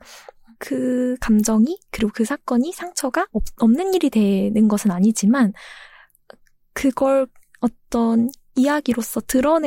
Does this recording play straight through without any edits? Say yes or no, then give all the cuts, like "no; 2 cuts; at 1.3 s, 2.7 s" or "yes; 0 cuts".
yes; 0 cuts